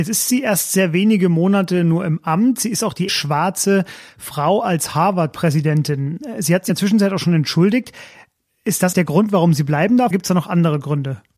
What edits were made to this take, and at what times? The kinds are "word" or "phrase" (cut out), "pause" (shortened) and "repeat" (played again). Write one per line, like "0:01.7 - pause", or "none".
0:03.1 - word
0:06.7 - word
0:08.9 - word
0:10.1 - word

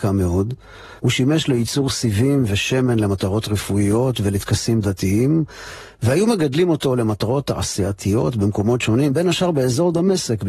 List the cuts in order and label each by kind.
0:01.0 - pause

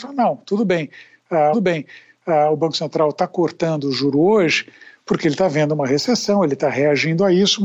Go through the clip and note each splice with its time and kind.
0:01.5 - repeat

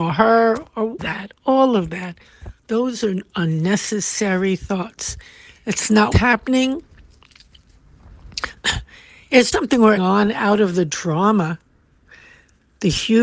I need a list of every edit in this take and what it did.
0:01.0 - phrase
0:02.6 - pause
0:06.1 - word
0:09.5 - word
0:10.0 - word

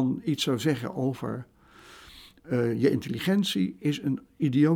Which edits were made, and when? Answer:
none

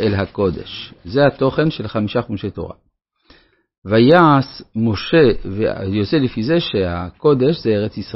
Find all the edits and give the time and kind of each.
none

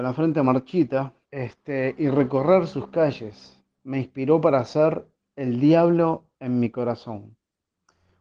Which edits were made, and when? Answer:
0:01.2 - pause

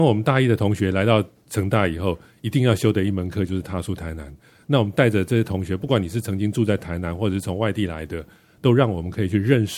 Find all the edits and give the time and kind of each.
none

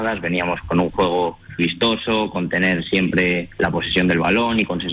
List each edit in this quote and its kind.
0:01.6 - word
0:03.5 - pause

